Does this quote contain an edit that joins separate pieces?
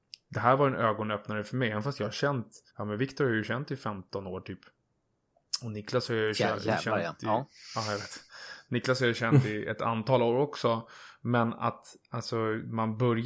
yes; 1 cut; at 2.7 s

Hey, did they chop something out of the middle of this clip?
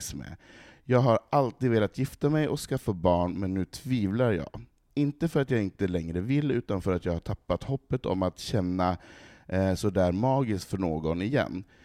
no; 0 cuts

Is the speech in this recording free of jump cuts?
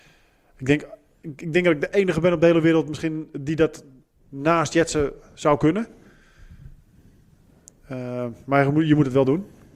yes; 0 cuts

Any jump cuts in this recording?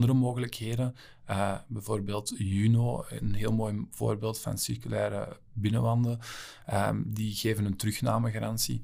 no; 0 cuts

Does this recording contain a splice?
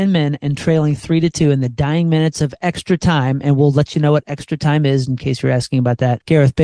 no; 0 cuts

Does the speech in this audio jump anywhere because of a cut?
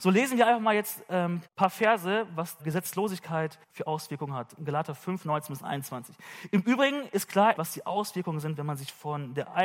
yes; 4 cuts; at 1.5 s, 2.6 s, 3.6 s, 7.6 s

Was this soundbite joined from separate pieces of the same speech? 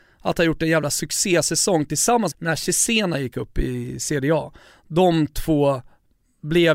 yes; 1 cut; at 2.3 s

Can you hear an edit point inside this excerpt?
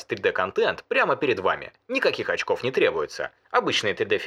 no; 0 cuts

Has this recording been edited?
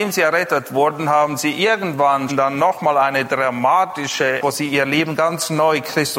yes; 1 cut; at 2.3 s

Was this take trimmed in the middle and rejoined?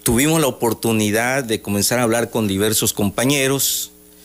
no; 0 cuts

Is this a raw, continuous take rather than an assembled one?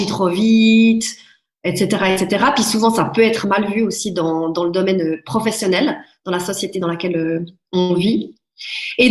yes; 0 cuts

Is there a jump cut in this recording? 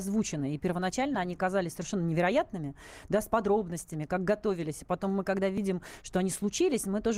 no; 0 cuts

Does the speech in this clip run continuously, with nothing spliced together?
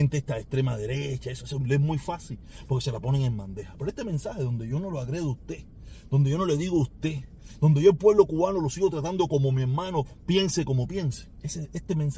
yes; 0 cuts

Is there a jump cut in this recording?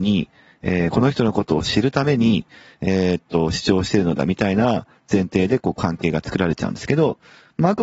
no; 0 cuts

